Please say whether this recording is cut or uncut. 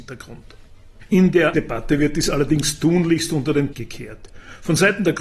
cut